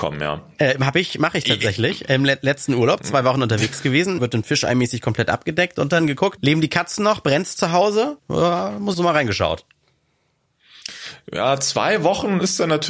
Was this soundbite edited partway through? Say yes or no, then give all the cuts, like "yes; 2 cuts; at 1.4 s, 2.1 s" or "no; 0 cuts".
yes; 4 cuts; at 4.2 s, 6.4 s, 8.2 s, 8.9 s